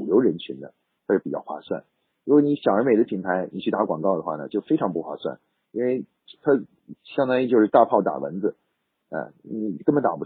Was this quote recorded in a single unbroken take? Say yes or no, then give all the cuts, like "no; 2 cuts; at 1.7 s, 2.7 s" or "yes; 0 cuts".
yes; 0 cuts